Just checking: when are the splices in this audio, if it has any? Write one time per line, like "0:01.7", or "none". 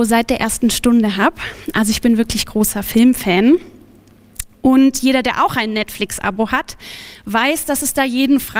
none